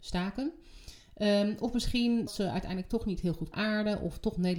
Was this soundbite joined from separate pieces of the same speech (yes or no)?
yes